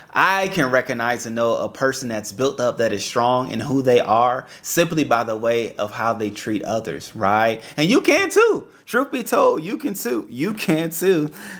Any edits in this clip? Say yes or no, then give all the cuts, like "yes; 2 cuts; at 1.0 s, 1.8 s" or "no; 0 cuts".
no; 0 cuts